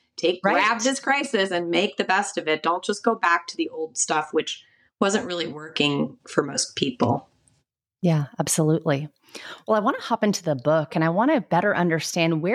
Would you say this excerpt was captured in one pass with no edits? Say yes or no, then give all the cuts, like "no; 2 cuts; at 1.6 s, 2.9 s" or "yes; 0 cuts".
yes; 0 cuts